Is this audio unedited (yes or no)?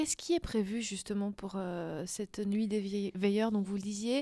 yes